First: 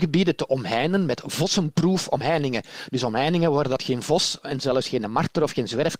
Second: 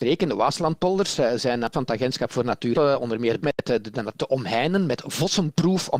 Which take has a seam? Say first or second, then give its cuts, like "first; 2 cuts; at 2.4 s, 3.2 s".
second; 4 cuts; at 1.7 s, 2.7 s, 3.4 s, 4.2 s